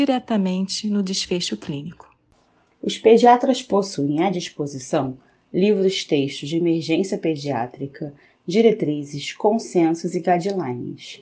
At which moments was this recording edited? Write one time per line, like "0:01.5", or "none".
none